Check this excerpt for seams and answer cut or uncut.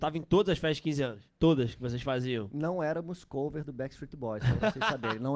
cut